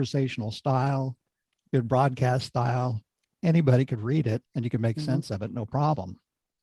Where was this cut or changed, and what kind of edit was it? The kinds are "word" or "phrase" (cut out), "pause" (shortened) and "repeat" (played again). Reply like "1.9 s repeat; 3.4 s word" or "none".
4.5 s pause